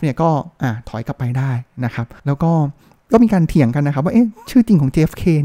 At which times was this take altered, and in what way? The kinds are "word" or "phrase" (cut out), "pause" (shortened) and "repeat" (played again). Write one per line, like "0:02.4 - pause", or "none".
0:02.2 - pause